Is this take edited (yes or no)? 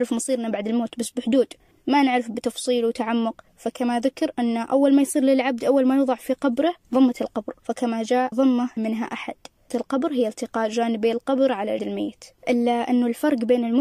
yes